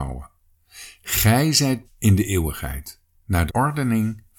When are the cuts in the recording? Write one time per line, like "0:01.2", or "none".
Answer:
0:01.8
0:03.5